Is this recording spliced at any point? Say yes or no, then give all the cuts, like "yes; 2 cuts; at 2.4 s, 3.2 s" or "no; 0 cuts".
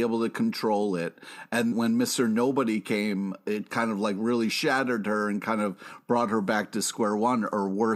yes; 1 cut; at 1.7 s